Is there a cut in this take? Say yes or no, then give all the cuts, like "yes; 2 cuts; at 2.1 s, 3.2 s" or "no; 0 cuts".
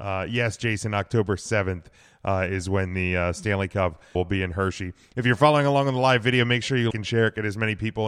yes; 2 cuts; at 4.1 s, 6.9 s